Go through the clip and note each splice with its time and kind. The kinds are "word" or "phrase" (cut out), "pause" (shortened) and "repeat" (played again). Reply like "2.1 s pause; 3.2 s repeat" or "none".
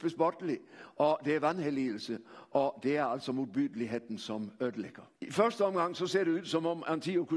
5.2 s pause